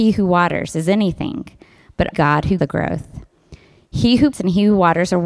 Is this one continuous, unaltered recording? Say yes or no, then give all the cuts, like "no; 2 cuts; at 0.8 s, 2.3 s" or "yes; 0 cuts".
no; 3 cuts; at 2.1 s, 2.6 s, 4.3 s